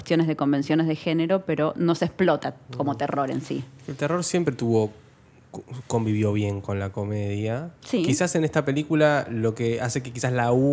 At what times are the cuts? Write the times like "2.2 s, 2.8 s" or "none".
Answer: 7.8 s